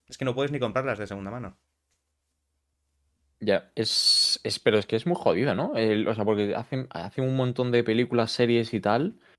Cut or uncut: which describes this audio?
uncut